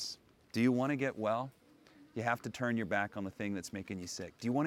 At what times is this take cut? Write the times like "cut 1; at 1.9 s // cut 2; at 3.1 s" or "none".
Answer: none

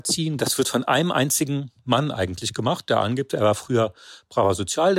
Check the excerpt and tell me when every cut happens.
none

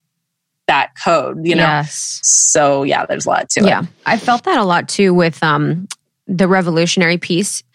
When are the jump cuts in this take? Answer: none

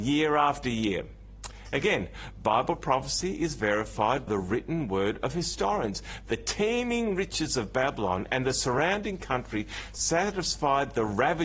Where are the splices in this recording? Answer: cut 1; at 4.3 s

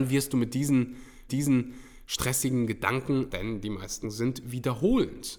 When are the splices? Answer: cut 1; at 1.3 s // cut 2; at 3.3 s // cut 3; at 4.0 s

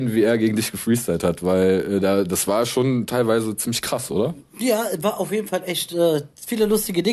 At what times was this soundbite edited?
cut 1; at 4.5 s

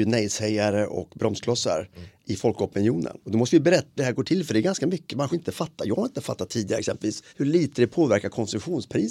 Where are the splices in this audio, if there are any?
cut 1; at 3.2 s // cut 2; at 4.0 s // cut 3; at 5.3 s // cut 4; at 7.3 s

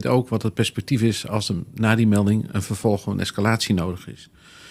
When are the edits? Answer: none

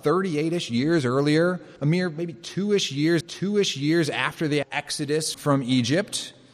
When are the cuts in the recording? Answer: cut 1; at 1.8 s // cut 2; at 3.2 s // cut 3; at 4.6 s // cut 4; at 5.3 s

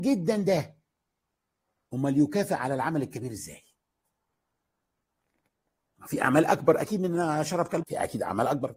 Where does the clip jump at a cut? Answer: cut 1; at 7.8 s

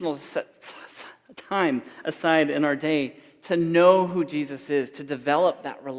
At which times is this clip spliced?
none

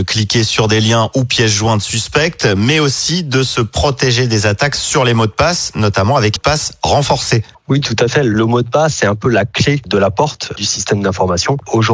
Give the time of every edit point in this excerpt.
cut 1; at 6.4 s

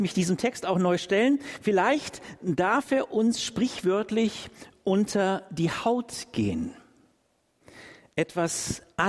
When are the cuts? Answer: none

